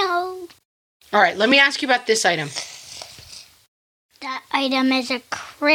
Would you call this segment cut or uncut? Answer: uncut